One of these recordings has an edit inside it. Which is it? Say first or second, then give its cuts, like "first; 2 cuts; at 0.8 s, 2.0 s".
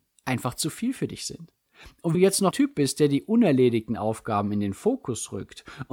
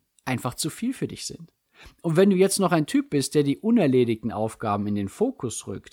first; 2 cuts; at 2.1 s, 2.5 s